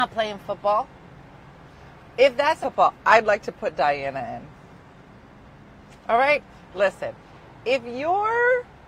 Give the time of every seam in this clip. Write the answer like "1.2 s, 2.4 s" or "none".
2.6 s